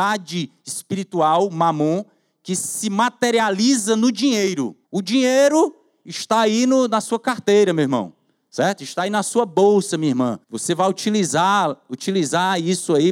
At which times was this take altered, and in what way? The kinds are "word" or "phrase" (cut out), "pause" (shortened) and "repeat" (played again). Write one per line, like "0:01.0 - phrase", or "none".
0:04.8 - pause
0:10.4 - pause